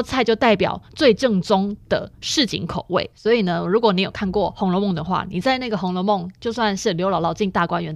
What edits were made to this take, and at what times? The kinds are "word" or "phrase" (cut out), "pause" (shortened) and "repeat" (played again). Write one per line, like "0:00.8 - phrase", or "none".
0:03.1 - pause